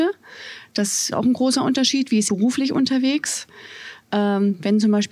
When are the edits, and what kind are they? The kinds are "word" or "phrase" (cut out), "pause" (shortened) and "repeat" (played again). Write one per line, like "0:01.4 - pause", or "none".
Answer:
0:01.1 - word
0:02.3 - word